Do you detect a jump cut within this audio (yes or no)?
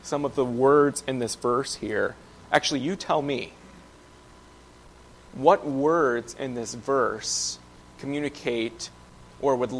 no